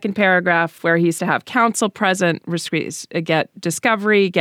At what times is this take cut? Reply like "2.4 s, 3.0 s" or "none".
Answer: 1.2 s